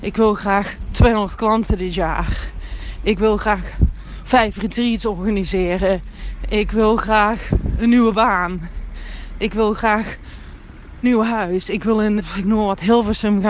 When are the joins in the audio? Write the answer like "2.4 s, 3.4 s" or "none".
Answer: 11.0 s, 12.2 s